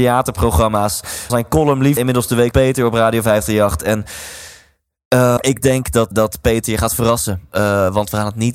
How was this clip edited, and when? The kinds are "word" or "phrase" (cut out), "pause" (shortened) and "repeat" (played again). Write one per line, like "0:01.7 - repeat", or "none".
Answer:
0:01.3 - word
0:02.0 - word
0:02.5 - word
0:05.4 - word
0:06.1 - word

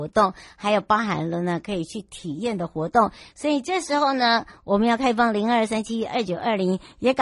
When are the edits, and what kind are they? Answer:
none

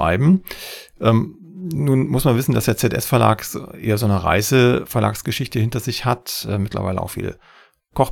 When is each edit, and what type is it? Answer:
none

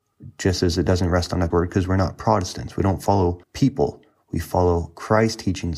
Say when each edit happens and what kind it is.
0:01.5 - word
0:03.4 - pause

